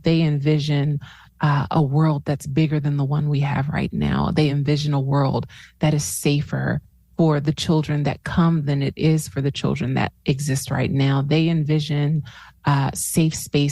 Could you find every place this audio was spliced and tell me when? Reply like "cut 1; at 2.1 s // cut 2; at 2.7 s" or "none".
none